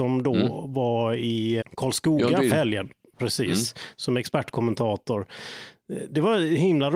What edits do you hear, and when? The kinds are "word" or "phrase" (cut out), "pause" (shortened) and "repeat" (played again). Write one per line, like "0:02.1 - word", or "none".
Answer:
0:01.6 - word
0:02.5 - word